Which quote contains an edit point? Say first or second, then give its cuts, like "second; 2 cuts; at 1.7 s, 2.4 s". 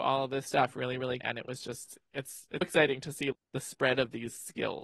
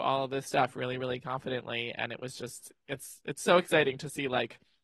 first; 3 cuts; at 1.2 s, 2.6 s, 3.3 s